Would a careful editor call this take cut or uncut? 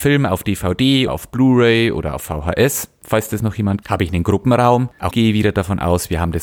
cut